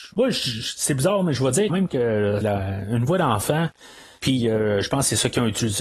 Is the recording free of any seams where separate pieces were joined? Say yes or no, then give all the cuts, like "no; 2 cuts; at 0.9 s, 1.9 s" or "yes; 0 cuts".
no; 2 cuts; at 1.7 s, 2.4 s